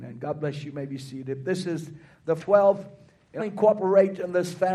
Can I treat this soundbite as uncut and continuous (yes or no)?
no